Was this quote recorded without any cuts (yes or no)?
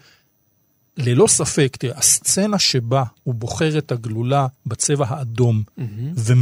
no